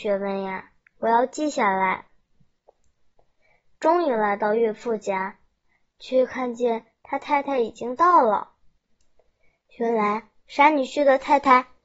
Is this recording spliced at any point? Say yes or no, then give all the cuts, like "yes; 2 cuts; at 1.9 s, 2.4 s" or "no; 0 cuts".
no; 0 cuts